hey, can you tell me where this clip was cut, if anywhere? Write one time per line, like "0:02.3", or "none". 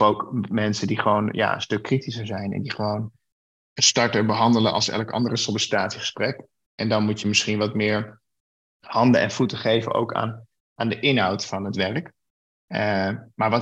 none